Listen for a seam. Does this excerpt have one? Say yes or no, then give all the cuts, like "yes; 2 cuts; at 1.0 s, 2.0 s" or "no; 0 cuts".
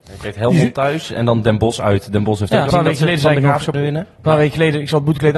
yes; 2 cuts; at 2.7 s, 3.7 s